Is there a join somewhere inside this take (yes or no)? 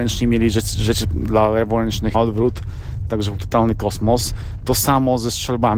yes